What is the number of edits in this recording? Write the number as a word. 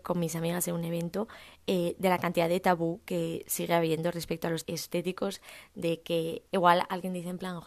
two